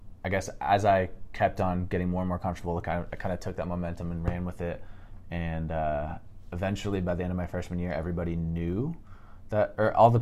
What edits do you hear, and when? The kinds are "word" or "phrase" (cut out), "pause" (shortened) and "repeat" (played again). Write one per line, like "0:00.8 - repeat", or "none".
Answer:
none

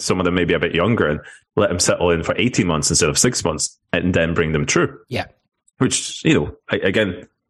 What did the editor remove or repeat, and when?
none

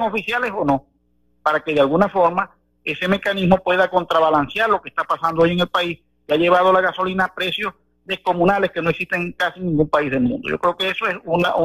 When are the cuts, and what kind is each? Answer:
none

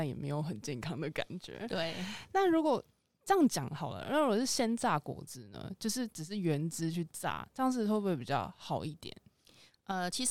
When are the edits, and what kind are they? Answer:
none

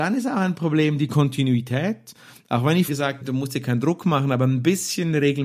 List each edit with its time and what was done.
0:02.9 - word
0:03.2 - word

